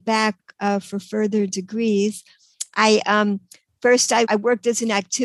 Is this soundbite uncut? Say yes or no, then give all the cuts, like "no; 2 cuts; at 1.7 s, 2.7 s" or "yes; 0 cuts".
no; 1 cut; at 4.3 s